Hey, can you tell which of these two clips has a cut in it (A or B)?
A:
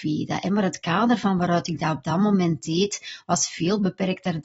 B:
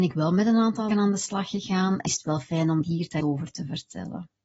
B